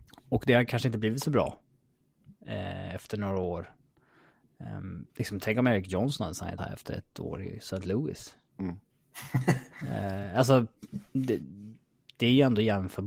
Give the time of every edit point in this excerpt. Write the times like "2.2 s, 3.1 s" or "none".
5.1 s, 6.6 s, 11.1 s